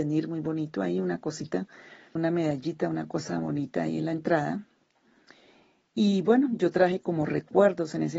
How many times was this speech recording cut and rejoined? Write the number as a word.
one